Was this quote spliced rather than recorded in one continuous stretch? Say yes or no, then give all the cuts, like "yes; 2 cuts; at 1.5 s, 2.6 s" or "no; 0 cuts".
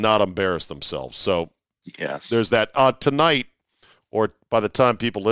no; 0 cuts